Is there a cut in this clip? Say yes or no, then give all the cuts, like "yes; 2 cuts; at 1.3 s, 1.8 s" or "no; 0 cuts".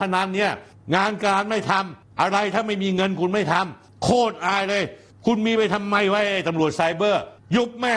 no; 0 cuts